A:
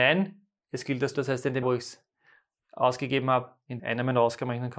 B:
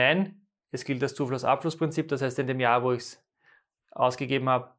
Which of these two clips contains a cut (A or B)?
A